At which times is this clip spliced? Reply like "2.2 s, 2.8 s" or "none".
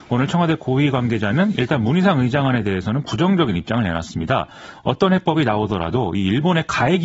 none